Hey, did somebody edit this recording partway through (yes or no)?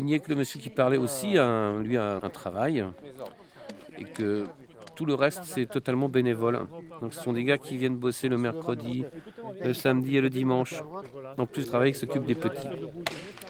yes